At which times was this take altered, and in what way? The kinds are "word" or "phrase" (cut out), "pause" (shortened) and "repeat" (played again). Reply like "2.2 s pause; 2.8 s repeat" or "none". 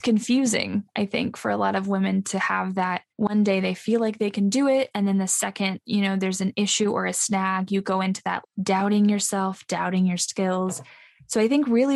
3.1 s pause; 8.4 s word